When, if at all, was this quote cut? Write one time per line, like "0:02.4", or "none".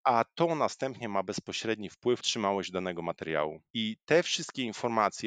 0:02.2